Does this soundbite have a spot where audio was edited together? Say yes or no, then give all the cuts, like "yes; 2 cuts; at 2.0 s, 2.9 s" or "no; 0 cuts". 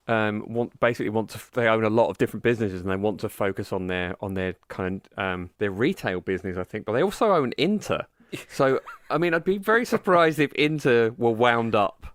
yes; 1 cut; at 5.5 s